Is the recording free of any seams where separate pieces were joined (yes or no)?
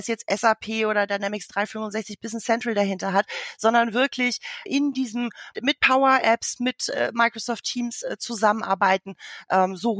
no